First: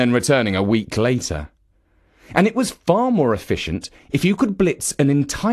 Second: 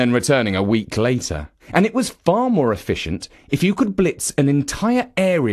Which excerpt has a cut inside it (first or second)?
second